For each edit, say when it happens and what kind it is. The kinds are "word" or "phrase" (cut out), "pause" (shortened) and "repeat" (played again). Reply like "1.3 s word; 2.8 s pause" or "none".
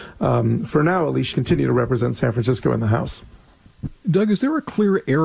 1.3 s word